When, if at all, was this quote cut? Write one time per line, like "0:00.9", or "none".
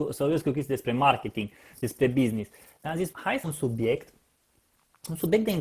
0:03.1
0:03.4